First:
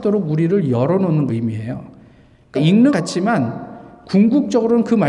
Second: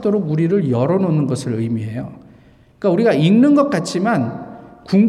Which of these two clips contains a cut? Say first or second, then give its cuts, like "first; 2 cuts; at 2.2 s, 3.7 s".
first; 3 cuts; at 1.3 s, 2.5 s, 2.9 s